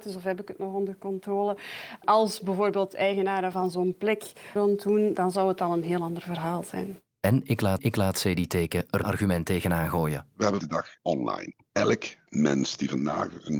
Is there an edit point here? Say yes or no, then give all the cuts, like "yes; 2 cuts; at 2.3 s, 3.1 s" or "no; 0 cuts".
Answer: yes; 4 cuts; at 4.6 s, 7.8 s, 9.0 s, 10.6 s